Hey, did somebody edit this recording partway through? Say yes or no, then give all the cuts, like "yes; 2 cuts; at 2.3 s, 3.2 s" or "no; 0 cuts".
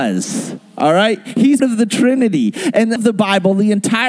yes; 2 cuts; at 1.6 s, 3.0 s